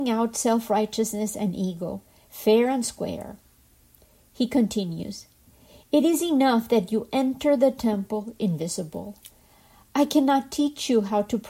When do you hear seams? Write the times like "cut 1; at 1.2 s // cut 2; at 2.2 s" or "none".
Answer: none

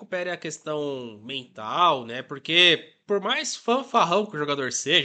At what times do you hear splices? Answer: none

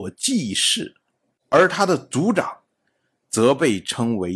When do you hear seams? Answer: none

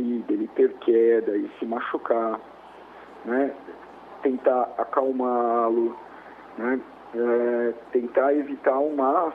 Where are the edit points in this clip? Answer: none

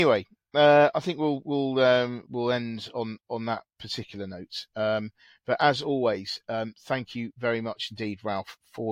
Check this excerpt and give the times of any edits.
cut 1; at 2.2 s

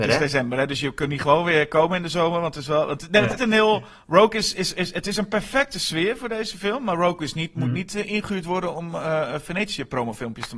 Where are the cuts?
cut 1; at 3.4 s

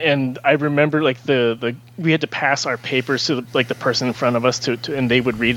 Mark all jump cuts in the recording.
none

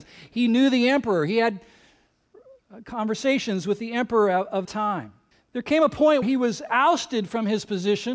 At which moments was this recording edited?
cut 1; at 4.6 s // cut 2; at 5.3 s // cut 3; at 6.2 s

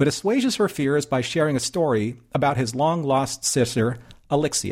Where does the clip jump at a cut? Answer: none

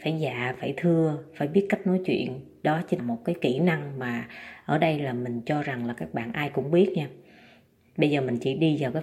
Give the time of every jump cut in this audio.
cut 1; at 3.0 s

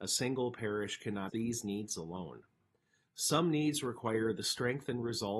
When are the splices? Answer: cut 1; at 1.3 s

